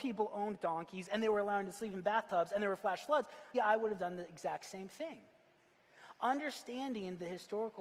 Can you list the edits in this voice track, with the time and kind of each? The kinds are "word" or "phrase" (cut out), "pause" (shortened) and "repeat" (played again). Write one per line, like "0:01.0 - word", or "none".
0:03.5 - word

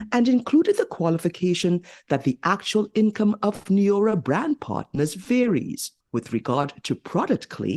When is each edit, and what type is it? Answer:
0:06.0 - pause

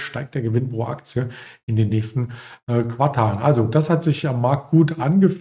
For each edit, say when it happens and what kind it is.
none

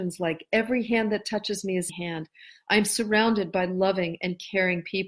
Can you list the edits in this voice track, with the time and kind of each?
0:01.9 - phrase

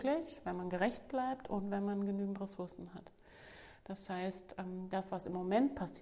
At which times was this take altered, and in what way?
none

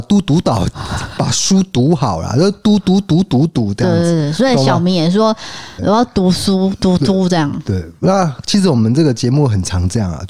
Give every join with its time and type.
0:05.8 - word

